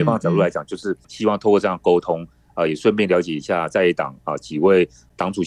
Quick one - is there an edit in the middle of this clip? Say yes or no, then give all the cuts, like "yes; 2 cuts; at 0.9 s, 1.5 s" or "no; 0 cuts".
yes; 1 cut; at 1.0 s